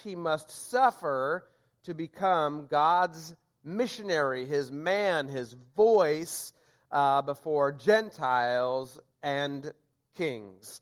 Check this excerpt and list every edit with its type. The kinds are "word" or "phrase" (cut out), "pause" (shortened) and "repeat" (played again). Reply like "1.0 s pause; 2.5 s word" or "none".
none